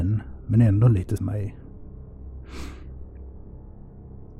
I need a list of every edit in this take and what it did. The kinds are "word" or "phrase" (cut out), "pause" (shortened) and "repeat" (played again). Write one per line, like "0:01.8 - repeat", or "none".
0:01.2 - word